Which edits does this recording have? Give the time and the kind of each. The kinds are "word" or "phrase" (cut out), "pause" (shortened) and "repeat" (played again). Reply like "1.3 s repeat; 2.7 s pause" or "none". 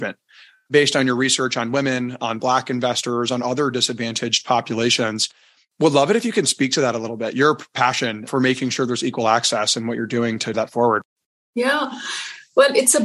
10.5 s word